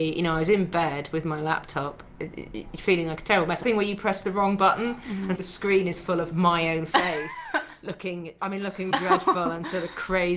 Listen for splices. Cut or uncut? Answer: cut